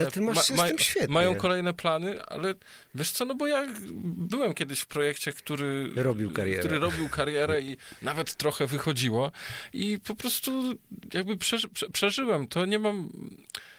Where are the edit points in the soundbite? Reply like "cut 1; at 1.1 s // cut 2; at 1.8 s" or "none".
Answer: none